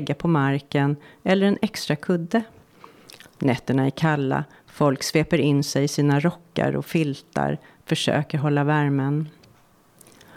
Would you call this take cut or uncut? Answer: uncut